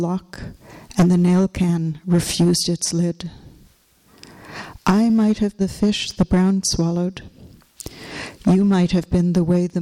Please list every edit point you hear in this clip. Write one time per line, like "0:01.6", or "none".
0:05.6
0:06.6